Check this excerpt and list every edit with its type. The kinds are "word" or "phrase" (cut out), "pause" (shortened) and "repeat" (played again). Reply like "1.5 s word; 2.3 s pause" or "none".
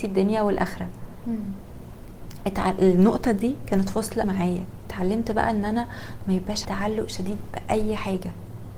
4.2 s word; 6.6 s word